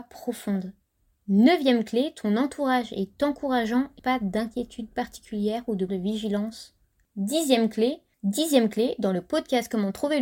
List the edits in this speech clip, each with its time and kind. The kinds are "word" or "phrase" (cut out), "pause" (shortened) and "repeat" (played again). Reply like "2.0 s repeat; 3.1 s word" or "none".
4.0 s phrase; 5.9 s word

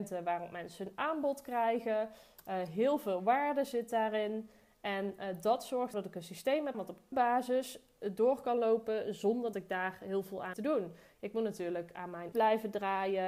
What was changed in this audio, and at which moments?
5.9 s word; 6.7 s word; 7.1 s word; 9.5 s word; 10.5 s word; 12.3 s word

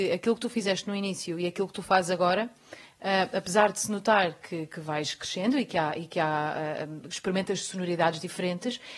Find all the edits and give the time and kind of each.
none

